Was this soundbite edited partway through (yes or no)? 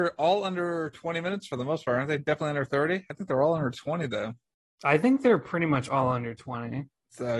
no